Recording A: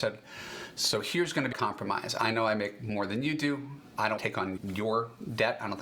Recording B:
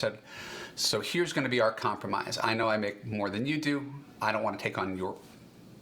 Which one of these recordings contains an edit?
A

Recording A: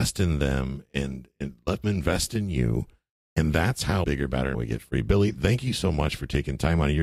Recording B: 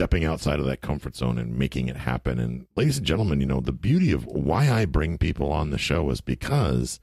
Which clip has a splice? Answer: A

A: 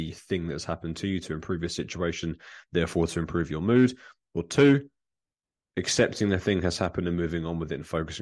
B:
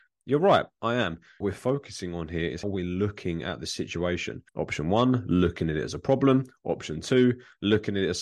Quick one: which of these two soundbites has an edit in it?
B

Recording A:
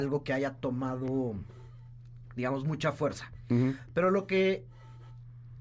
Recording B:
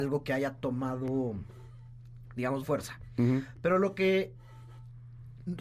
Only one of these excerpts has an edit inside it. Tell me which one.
B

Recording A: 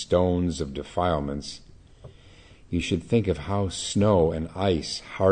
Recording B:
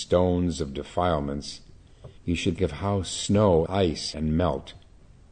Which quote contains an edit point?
B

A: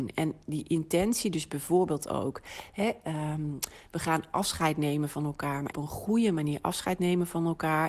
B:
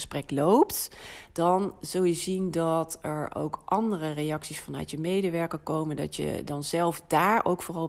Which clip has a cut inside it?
A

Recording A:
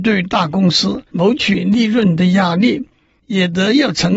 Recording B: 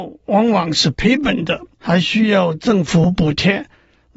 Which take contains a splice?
B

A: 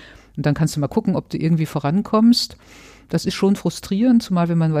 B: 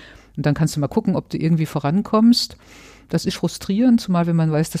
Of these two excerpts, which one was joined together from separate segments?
B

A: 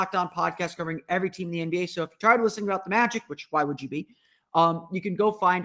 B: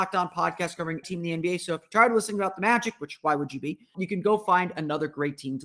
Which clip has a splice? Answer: B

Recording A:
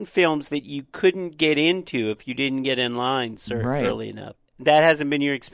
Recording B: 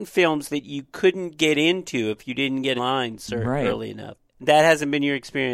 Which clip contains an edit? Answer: B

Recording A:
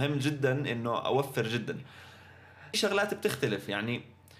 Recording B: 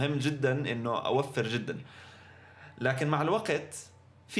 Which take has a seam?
A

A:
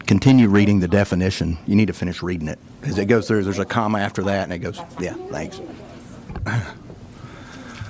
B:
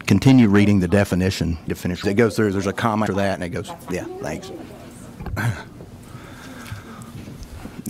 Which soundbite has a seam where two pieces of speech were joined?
B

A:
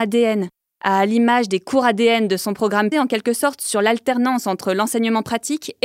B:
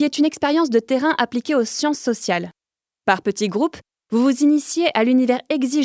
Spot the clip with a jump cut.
A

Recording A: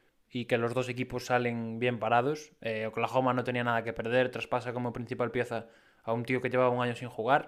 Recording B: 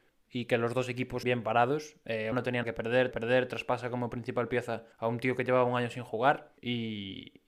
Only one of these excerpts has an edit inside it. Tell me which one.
B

